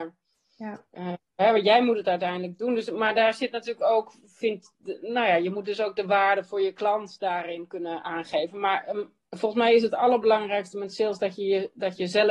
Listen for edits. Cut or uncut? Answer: uncut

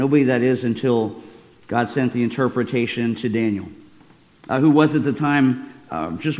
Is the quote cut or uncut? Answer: uncut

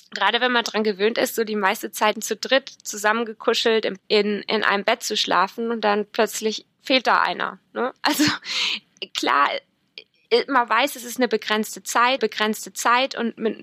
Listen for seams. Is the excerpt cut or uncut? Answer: cut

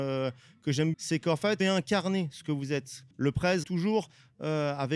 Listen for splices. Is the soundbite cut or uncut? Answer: cut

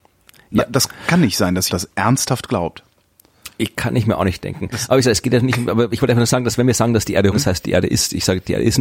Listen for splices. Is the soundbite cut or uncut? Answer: cut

